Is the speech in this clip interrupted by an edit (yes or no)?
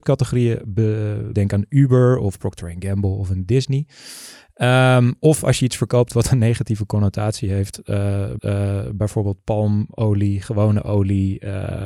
yes